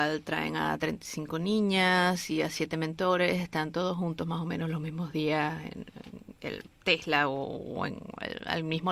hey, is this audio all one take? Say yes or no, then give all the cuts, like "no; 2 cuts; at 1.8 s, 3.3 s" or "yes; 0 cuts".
yes; 0 cuts